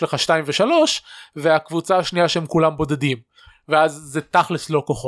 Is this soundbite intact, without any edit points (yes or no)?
yes